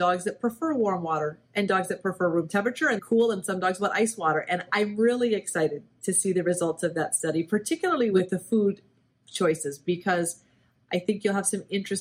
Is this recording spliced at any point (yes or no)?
yes